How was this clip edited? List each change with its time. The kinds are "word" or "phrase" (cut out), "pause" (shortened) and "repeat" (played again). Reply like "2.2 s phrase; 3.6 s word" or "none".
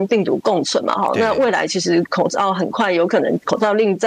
none